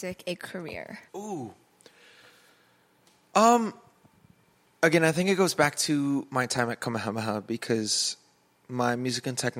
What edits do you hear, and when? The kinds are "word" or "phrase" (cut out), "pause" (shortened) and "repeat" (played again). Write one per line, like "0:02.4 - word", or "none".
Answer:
0:01.1 - pause
0:04.2 - pause